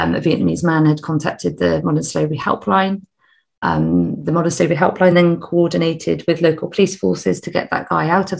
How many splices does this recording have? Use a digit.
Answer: 0